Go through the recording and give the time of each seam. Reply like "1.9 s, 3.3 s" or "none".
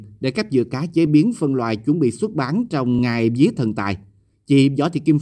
none